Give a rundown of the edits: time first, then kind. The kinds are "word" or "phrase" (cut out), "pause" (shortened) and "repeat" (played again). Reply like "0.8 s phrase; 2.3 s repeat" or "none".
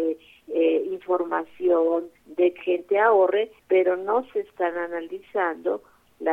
2.2 s pause; 2.6 s word; 3.6 s pause